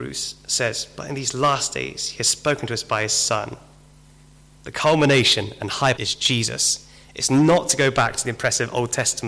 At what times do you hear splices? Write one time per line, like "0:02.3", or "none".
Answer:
0:06.0